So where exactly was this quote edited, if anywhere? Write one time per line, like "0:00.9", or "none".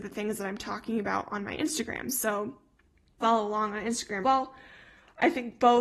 0:03.2
0:04.2